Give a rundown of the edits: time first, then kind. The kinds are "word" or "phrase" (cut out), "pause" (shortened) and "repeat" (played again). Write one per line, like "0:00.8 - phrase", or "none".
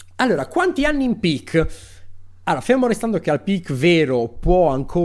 none